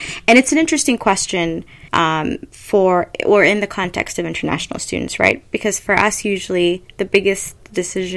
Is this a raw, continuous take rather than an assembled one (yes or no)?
no